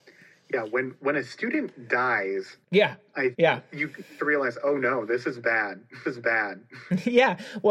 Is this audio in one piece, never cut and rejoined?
no; 4 cuts; at 2.6 s, 3.3 s, 4.2 s, 6.0 s

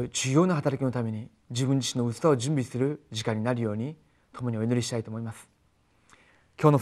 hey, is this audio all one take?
yes; 0 cuts

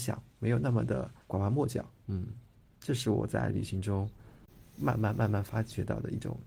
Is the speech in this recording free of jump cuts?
no; 2 cuts; at 1.2 s, 2.5 s

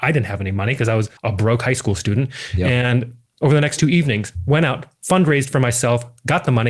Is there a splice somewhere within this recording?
yes; 1 cut; at 1.2 s

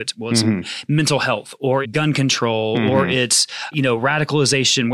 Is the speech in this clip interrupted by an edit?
yes; 2 cuts; at 1.8 s, 3.7 s

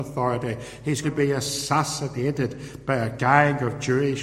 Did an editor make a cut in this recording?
yes; 1 cut; at 1.0 s

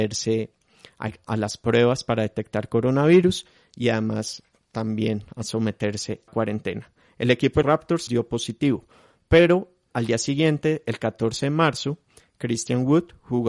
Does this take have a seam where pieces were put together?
yes; 4 cuts; at 1.2 s, 6.3 s, 7.6 s, 8.1 s

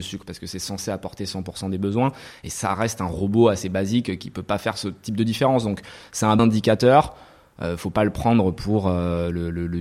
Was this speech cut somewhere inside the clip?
yes; 1 cut; at 6.4 s

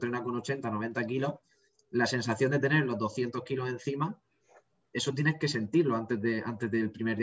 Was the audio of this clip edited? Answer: no; 0 cuts

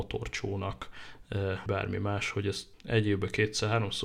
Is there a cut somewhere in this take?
yes; 2 cuts; at 1.7 s, 2.7 s

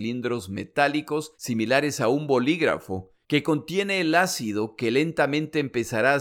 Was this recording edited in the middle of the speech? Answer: yes; 2 cuts; at 1.3 s, 3.2 s

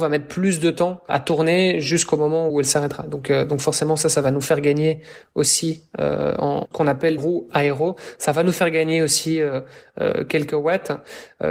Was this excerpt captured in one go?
no; 4 cuts; at 1.1 s, 2.5 s, 6.6 s, 7.2 s

